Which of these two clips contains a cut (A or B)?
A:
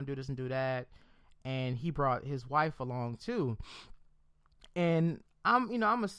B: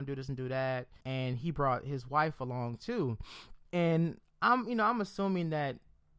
B